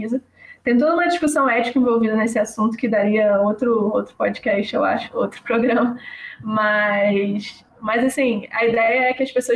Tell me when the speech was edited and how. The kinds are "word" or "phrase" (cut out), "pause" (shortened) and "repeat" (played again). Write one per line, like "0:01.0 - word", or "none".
none